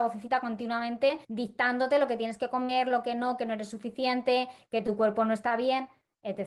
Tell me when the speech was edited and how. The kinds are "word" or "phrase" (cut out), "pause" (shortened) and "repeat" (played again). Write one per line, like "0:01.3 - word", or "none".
0:01.2 - pause